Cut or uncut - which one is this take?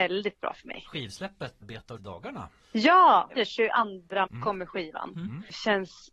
cut